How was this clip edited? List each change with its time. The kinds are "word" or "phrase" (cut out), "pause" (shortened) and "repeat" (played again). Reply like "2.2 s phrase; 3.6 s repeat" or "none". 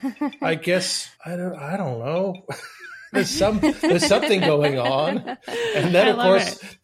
1.1 s pause